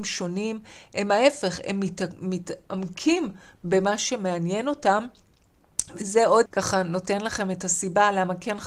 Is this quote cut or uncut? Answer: cut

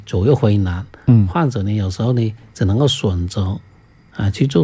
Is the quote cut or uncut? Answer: uncut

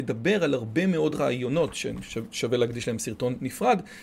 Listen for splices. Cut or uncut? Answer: uncut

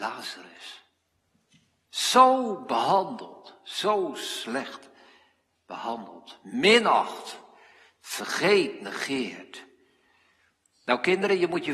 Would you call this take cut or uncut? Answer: uncut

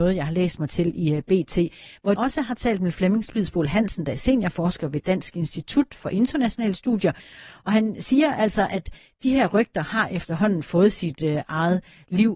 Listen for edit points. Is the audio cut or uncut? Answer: cut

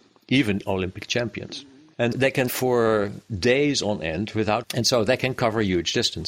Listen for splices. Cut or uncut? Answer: cut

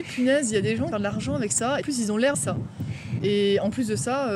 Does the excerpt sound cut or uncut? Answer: cut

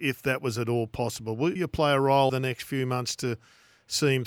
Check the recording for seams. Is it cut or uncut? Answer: cut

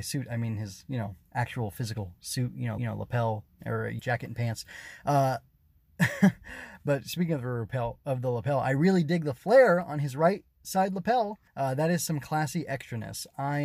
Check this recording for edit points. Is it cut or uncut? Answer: cut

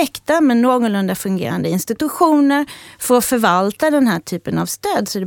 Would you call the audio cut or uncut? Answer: uncut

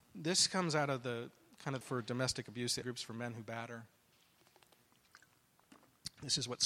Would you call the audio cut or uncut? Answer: cut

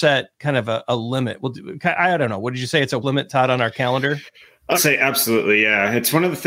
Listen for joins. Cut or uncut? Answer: cut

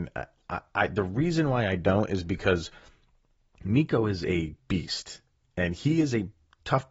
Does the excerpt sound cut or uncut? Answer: cut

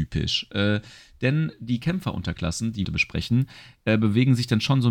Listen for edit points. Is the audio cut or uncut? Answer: cut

